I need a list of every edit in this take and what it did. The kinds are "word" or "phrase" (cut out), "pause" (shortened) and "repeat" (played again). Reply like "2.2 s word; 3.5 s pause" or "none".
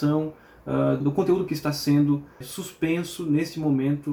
1.0 s word; 1.5 s word